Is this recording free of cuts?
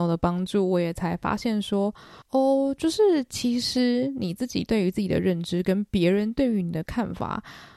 no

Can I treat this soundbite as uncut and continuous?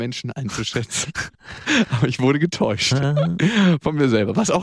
no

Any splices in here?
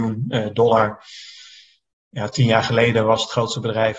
no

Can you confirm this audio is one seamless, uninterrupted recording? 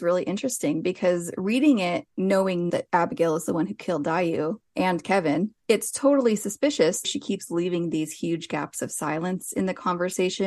no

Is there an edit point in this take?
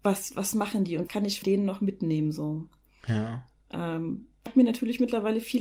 yes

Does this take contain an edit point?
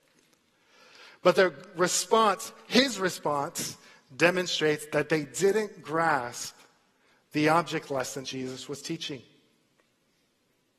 yes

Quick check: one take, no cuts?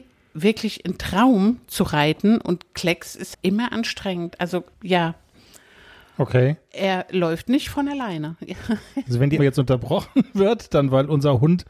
no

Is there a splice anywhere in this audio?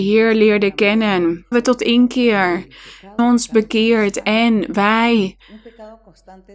yes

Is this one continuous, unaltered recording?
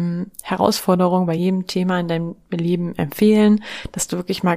yes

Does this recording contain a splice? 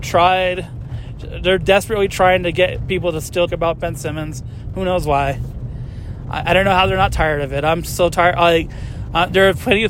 yes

